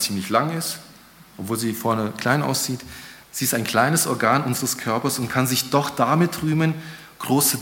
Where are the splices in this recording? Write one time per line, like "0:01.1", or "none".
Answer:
0:03.2